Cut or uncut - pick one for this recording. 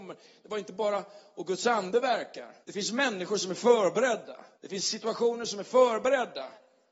cut